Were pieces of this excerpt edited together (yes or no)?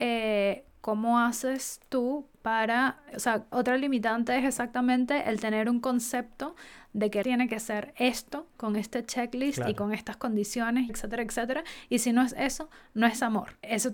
yes